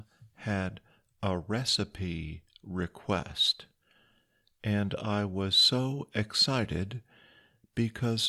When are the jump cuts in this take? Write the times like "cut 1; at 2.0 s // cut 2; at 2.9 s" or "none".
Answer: none